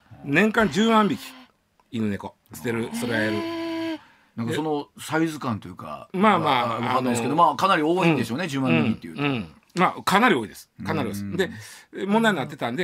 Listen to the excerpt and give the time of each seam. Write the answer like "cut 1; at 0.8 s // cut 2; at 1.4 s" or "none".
none